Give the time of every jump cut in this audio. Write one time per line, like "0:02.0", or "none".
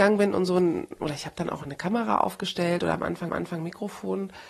0:03.3